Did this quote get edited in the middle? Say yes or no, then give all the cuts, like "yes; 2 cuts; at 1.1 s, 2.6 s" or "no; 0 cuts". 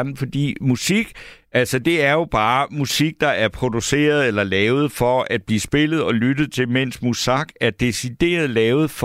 no; 0 cuts